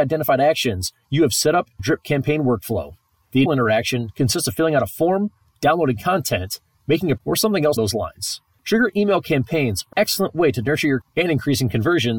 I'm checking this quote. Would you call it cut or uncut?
cut